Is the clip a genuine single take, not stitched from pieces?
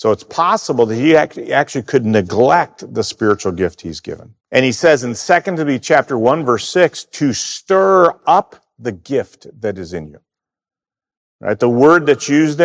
no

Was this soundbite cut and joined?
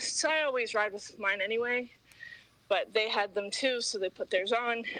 no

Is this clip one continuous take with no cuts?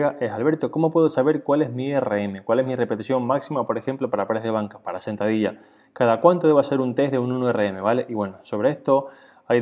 yes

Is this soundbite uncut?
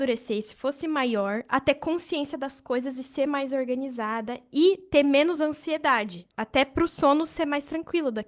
yes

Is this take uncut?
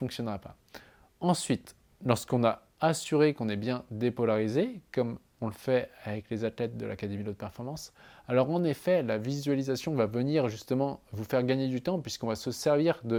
yes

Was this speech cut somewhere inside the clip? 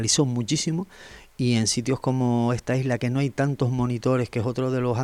no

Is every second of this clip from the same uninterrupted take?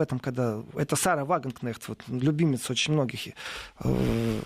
yes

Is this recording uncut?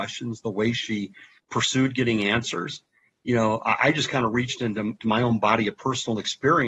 no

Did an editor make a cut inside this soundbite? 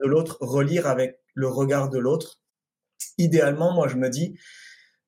no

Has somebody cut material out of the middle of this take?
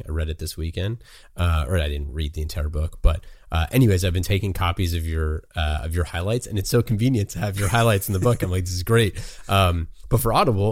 no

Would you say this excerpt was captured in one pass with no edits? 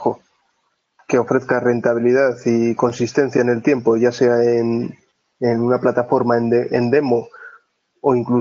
yes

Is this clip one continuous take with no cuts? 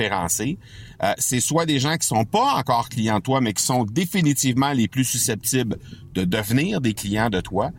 yes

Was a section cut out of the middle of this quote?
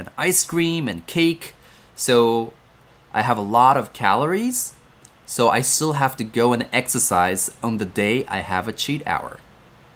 no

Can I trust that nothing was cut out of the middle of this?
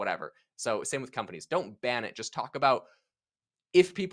yes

